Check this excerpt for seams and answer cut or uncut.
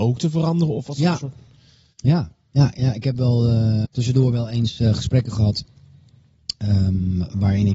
cut